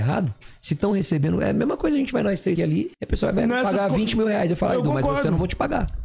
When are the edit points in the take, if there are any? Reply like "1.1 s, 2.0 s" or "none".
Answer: 2.6 s, 2.9 s